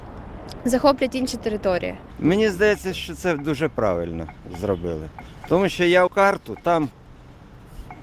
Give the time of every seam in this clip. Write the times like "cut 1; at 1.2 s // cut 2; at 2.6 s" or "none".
cut 1; at 6.1 s